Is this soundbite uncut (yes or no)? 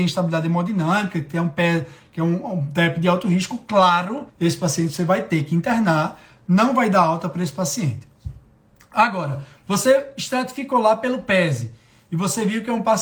no